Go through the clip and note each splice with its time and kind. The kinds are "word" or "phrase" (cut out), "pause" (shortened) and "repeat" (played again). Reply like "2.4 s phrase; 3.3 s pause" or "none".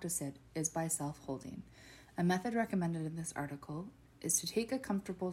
none